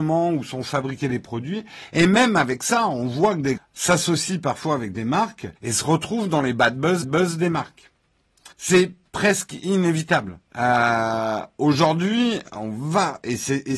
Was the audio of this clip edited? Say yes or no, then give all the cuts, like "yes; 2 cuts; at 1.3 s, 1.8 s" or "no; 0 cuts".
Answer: yes; 5 cuts; at 3.6 s, 5.6 s, 7.0 s, 8.5 s, 10.5 s